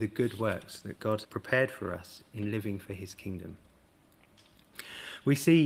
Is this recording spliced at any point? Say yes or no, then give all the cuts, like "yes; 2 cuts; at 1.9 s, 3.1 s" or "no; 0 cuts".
yes; 1 cut; at 1.2 s